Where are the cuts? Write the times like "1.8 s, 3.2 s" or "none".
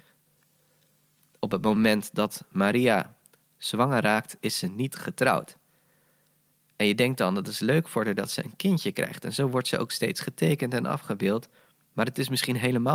none